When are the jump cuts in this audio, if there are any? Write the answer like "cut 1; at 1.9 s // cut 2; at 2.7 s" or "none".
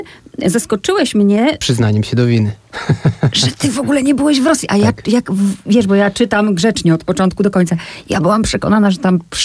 none